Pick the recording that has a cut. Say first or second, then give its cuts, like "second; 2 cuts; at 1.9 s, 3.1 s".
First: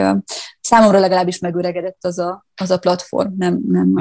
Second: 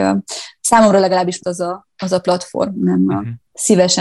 second; 2 cuts; at 1.4 s, 2.7 s